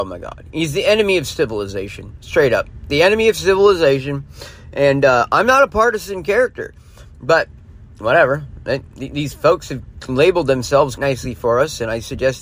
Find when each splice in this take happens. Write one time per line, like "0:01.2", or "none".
0:11.0